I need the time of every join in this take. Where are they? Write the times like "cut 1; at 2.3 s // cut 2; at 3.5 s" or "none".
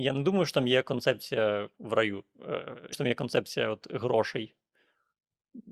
cut 1; at 1.7 s // cut 2; at 2.9 s